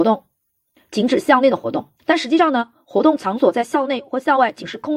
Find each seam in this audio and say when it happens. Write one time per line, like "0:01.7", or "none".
0:02.0